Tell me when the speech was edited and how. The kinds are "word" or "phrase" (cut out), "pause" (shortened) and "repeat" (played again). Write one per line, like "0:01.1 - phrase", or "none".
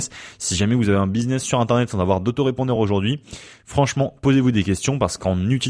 none